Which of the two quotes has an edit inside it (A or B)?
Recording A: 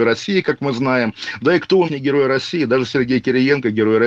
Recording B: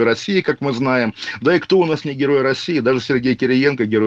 A